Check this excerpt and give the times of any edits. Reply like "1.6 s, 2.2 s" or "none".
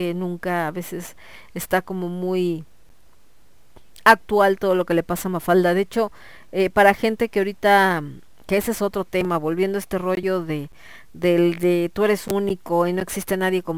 none